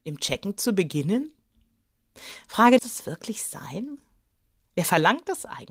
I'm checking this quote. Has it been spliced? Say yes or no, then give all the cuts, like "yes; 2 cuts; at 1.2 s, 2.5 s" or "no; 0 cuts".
yes; 1 cut; at 2.8 s